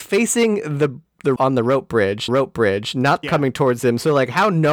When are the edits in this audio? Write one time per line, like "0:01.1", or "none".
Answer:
0:01.4
0:02.3
0:03.2